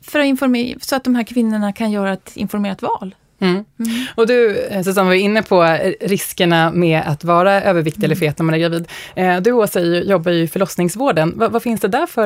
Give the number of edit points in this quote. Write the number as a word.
zero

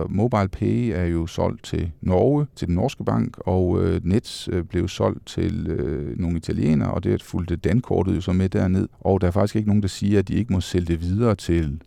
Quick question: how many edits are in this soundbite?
two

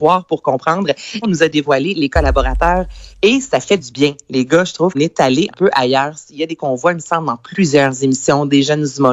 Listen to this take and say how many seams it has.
five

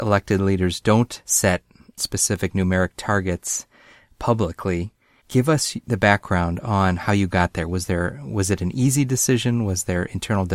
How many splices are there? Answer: zero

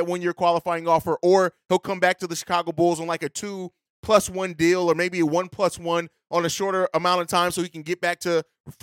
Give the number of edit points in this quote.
zero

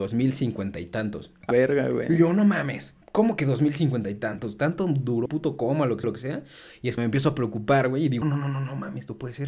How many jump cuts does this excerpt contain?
six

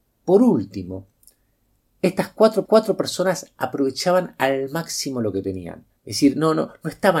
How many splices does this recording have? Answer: two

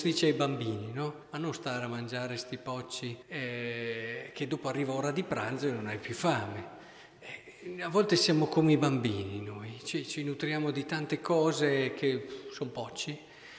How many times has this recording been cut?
two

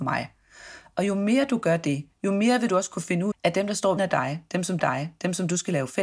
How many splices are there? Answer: three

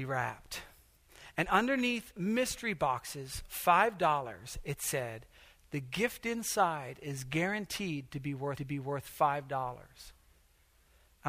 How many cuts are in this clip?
one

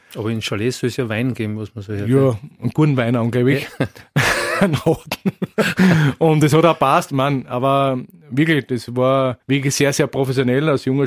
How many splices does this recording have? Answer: one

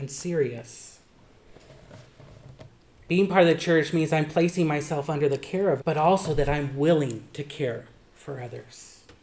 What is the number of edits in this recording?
one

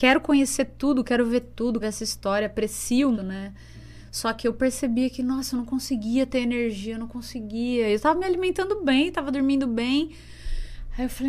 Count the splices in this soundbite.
two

